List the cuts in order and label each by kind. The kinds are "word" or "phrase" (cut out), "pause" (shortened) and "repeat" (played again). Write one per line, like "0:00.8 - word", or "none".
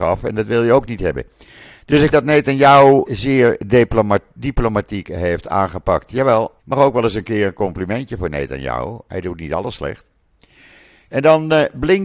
0:02.1 - word
0:03.0 - word
0:06.6 - pause

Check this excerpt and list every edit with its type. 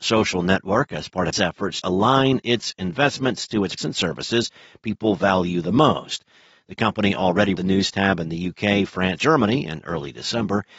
0:01.3 - word
0:01.8 - word
0:03.8 - word
0:07.6 - word
0:09.2 - word

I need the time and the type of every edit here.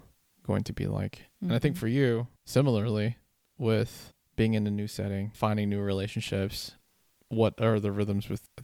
0:02.4 - pause

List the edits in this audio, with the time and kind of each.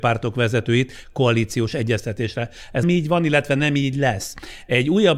0:02.8 - phrase

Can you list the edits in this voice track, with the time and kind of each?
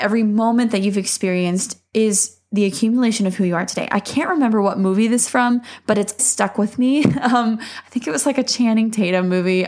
0:05.3 - word
0:06.2 - word

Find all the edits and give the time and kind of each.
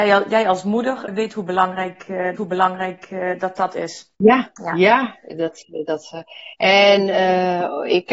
0:01.1 - word
0:02.4 - repeat
0:04.1 - pause
0:06.5 - pause

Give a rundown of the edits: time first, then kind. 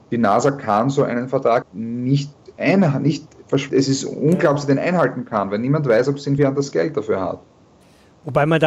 0:01.6 - word
0:03.7 - word
0:06.4 - word

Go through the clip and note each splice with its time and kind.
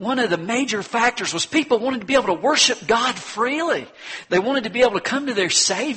none

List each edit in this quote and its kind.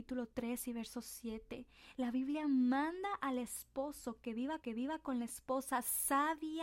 0:04.6 - repeat

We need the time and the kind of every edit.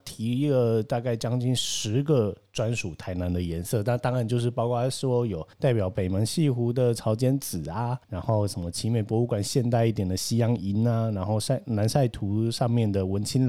0:05.5 - pause
0:08.0 - pause

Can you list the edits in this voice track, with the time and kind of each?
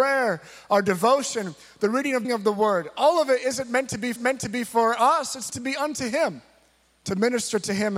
0:02.2 - phrase
0:04.2 - repeat
0:05.5 - word

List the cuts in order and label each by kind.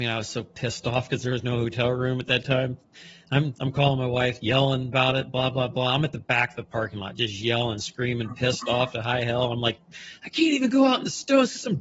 none

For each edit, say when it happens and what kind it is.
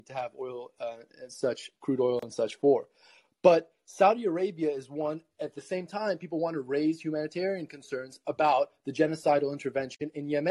none

